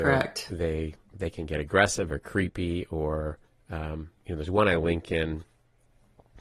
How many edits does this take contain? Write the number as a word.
two